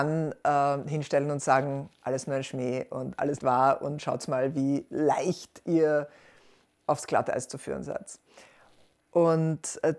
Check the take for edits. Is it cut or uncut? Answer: cut